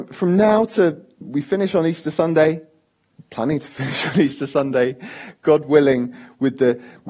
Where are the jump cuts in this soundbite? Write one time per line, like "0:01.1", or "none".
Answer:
0:01.2
0:03.1